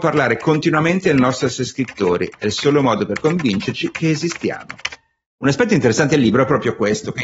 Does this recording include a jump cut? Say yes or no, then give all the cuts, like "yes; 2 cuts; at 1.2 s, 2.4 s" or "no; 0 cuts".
no; 0 cuts